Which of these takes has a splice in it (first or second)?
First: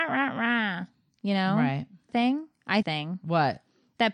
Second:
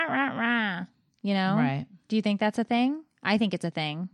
first